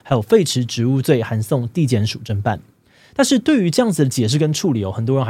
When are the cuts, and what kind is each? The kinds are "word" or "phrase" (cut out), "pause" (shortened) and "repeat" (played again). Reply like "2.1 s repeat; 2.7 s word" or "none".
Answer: none